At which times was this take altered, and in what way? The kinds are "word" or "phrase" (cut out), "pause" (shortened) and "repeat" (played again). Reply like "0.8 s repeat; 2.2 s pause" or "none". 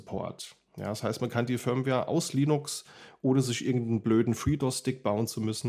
none